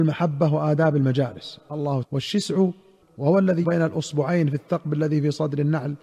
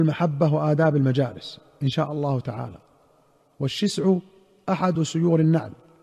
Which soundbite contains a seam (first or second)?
first